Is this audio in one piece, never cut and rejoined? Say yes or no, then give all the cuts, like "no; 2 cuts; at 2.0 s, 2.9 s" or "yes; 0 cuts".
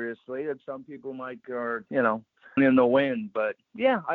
no; 3 cuts; at 1.4 s, 1.9 s, 2.6 s